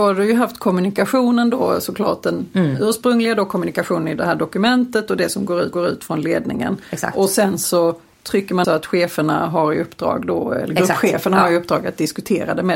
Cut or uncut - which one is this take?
cut